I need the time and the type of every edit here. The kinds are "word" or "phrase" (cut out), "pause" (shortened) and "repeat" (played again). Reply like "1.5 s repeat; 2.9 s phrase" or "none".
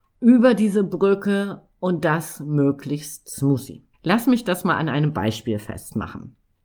3.9 s pause